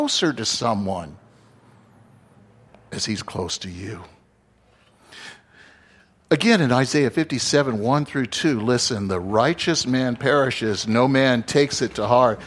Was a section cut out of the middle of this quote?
no; 0 cuts

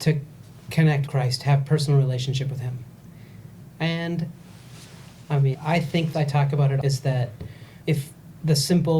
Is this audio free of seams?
no; 6 cuts; at 1.1 s, 3.7 s, 5.5 s, 6.1 s, 6.8 s, 7.8 s

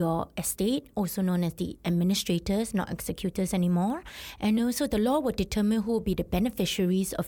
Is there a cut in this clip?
no; 0 cuts

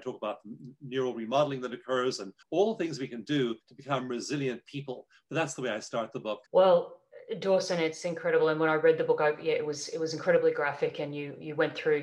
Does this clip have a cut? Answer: yes; 3 cuts; at 2.4 s, 3.6 s, 6.5 s

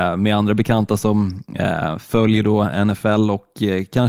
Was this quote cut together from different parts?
no; 0 cuts

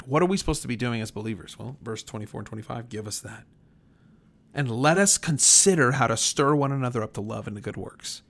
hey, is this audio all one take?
yes; 0 cuts

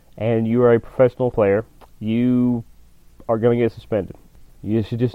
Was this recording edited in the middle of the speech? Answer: yes; 1 cut; at 1.3 s

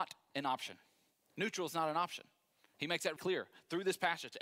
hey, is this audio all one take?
no; 1 cut; at 3.2 s

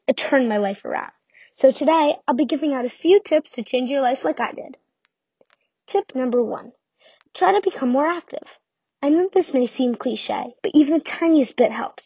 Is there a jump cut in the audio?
yes; 1 cut; at 10.6 s

